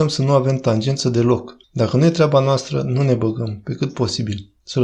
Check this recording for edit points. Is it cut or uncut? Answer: cut